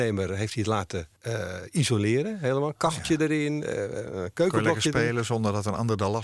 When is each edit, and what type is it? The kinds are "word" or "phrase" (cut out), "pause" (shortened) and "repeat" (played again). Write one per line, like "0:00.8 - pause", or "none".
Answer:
0:01.2 - pause